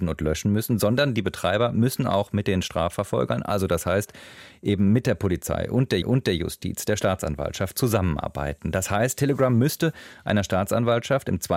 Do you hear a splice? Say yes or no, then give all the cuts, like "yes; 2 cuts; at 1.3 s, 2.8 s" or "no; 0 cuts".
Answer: yes; 1 cut; at 6.0 s